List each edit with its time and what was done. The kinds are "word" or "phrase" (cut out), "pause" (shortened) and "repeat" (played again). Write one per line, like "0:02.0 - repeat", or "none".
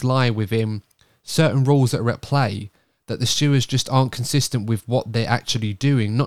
none

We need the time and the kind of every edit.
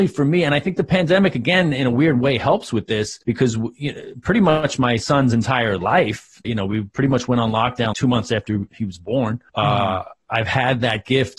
0:03.2 - pause
0:06.4 - word
0:07.9 - word
0:09.5 - pause

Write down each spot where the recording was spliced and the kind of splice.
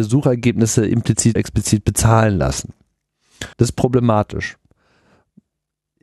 0:01.4 - word
0:03.5 - pause

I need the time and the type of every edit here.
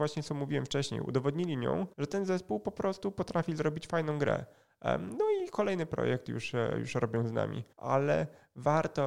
0:01.9 - pause
0:07.7 - pause

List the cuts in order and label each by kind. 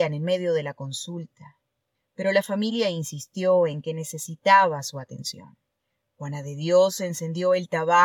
0:01.9 - pause
0:05.8 - pause

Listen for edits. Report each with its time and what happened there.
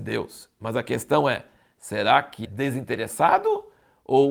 0:02.4 - word

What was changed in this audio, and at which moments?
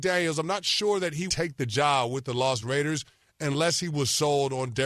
0:01.3 - word
0:02.6 - word

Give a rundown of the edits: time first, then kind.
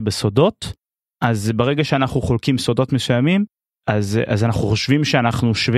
none

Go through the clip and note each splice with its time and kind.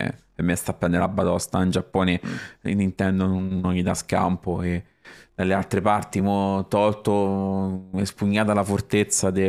none

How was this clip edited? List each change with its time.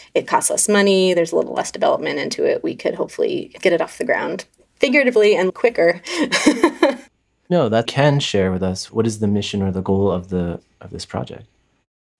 0:04.5 - pause
0:05.5 - word
0:07.9 - phrase

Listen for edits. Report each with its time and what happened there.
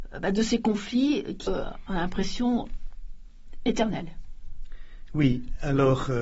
0:01.5 - word

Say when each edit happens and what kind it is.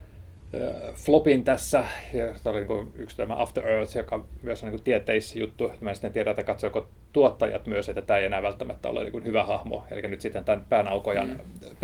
none

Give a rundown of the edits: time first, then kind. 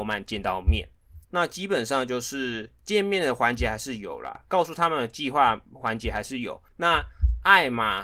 0:01.2 - pause
0:06.7 - pause

